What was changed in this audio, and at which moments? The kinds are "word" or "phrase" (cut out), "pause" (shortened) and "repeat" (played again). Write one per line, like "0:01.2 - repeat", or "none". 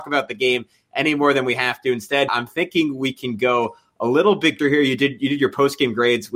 0:02.3 - word
0:04.6 - word